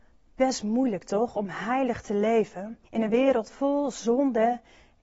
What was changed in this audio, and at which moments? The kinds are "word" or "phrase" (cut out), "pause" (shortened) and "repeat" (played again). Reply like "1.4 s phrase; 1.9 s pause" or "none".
2.8 s pause